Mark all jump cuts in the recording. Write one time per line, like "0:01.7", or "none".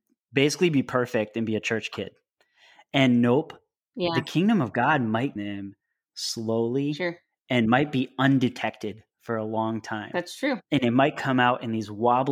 0:05.4